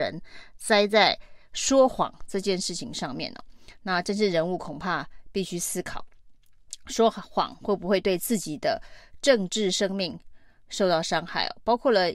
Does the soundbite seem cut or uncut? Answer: uncut